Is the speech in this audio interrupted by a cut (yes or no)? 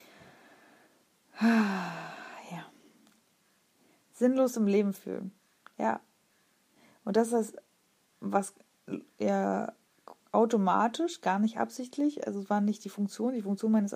no